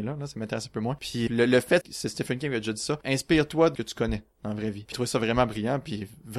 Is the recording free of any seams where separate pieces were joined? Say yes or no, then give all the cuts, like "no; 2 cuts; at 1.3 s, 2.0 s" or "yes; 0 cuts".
no; 4 cuts; at 1.3 s, 1.8 s, 3.7 s, 4.9 s